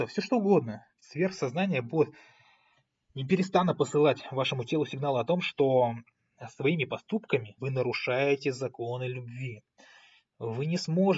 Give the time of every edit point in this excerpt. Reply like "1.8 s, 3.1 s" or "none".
0.9 s, 7.6 s